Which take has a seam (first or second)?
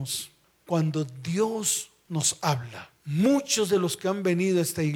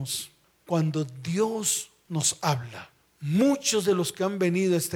first